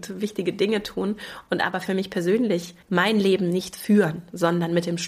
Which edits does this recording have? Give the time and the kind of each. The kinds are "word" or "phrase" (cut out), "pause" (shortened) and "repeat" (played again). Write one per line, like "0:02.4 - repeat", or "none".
0:02.8 - pause